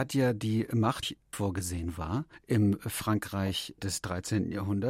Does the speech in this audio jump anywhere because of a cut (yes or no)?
yes